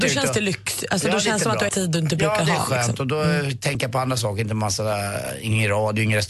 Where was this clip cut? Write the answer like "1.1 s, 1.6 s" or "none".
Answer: 1.7 s